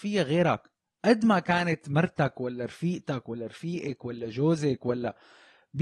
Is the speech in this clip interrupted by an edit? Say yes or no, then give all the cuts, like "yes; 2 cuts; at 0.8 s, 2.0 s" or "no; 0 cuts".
no; 0 cuts